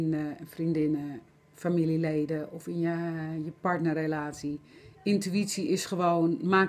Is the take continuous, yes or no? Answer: yes